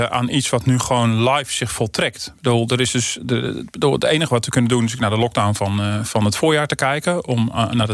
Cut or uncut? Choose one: uncut